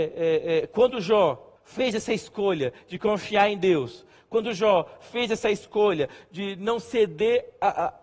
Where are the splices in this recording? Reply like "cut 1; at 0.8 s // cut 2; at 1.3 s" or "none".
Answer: cut 1; at 1.6 s